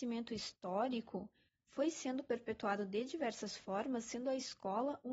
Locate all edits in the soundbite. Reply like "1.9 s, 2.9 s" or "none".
none